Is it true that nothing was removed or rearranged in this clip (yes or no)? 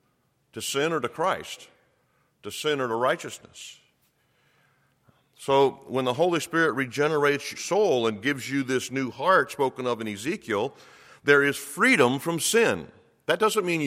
no